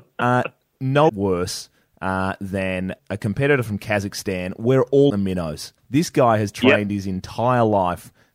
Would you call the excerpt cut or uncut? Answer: cut